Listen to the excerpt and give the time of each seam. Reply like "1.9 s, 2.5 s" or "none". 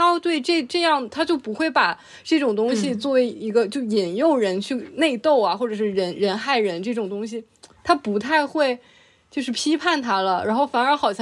none